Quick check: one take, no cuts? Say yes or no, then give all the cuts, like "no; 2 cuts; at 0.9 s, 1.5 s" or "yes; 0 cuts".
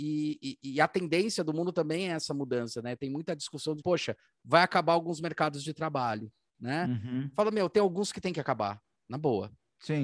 no; 1 cut; at 3.8 s